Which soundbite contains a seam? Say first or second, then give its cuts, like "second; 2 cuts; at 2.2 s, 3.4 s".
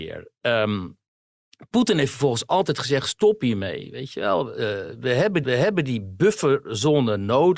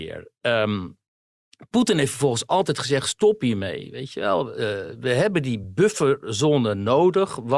first; 1 cut; at 5.4 s